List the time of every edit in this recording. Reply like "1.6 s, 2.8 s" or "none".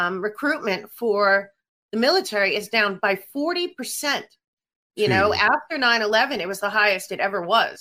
none